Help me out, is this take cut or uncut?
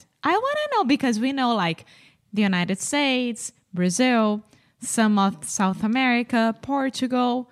uncut